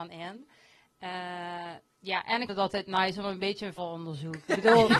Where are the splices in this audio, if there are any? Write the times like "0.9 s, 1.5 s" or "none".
2.5 s, 3.8 s